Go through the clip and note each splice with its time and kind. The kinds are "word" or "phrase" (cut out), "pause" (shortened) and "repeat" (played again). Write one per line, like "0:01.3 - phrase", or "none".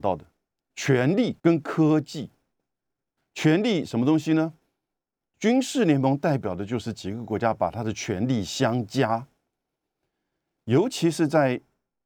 0:01.4 - pause
0:03.2 - word